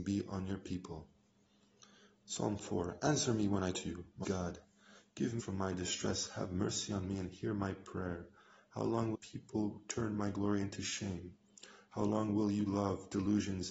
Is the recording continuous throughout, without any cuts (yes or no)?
no